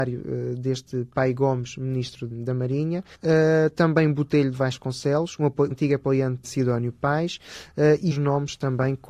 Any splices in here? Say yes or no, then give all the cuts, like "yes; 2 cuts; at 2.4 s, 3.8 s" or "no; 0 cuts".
yes; 5 cuts; at 2.3 s, 3.1 s, 5.7 s, 6.4 s, 8.1 s